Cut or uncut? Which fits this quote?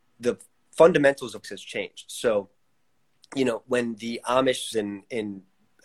cut